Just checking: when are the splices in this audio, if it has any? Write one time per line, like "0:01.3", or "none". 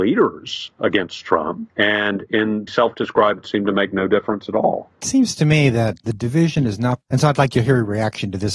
0:02.7
0:03.4
0:07.0